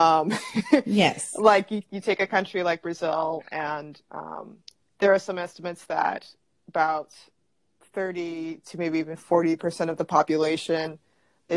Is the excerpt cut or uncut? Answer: uncut